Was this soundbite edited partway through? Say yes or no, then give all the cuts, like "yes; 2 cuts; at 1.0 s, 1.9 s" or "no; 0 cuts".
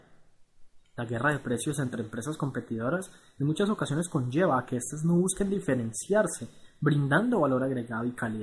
no; 0 cuts